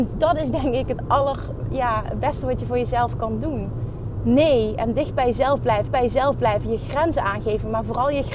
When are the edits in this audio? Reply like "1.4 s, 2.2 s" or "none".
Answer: 5.9 s